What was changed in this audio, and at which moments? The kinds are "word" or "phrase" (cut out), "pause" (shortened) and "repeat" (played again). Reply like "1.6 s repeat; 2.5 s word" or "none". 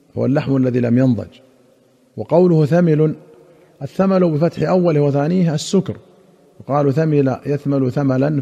none